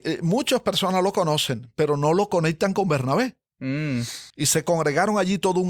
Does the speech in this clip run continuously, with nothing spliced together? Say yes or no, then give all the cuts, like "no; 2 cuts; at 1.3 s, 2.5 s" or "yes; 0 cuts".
no; 1 cut; at 4.3 s